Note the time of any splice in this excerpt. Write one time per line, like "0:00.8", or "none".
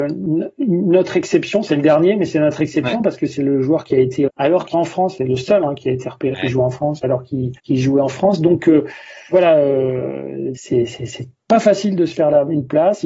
0:03.4
0:04.3
0:04.7
0:06.3
0:07.0
0:07.6